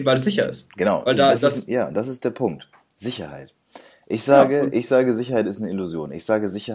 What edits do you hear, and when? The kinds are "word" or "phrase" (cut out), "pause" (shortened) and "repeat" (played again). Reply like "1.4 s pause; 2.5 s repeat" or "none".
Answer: 1.1 s word